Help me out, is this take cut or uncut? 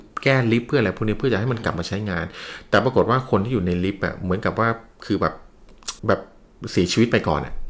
cut